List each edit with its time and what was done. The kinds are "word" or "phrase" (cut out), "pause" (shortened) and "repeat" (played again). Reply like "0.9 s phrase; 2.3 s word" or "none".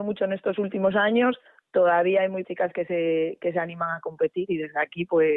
2.4 s word